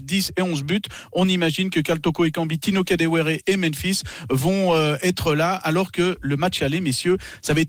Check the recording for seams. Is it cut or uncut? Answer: uncut